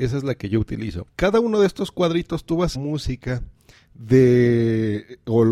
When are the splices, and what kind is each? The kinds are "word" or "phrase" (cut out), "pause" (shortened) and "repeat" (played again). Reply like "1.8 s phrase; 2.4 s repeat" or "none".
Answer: 1.1 s pause; 2.7 s phrase